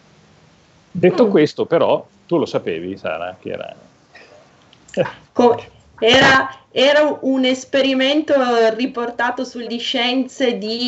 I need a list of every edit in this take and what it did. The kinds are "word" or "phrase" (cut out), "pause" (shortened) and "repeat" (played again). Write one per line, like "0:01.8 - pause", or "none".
0:02.1 - pause
0:09.7 - word